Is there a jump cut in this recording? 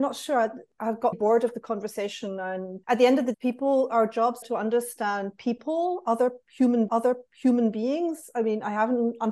yes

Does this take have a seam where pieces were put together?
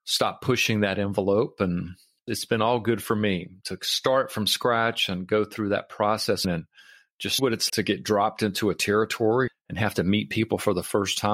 yes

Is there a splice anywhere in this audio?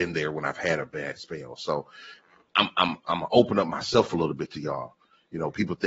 no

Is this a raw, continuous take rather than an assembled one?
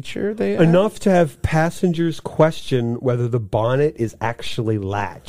yes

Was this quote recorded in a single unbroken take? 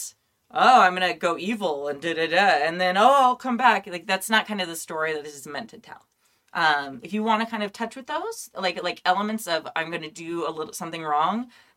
yes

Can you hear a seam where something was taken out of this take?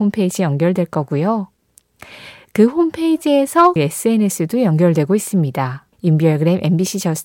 yes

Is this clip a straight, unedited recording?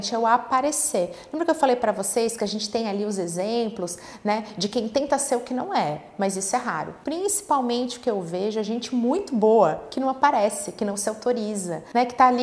yes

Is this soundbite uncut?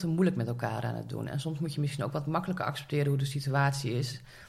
yes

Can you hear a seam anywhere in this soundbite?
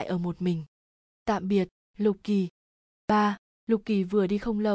no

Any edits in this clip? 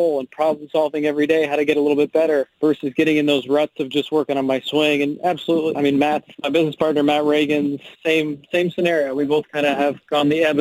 yes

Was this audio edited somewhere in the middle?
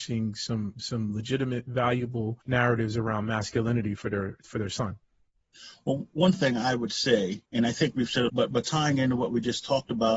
yes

